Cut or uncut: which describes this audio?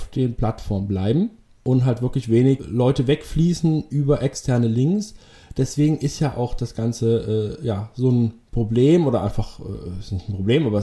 uncut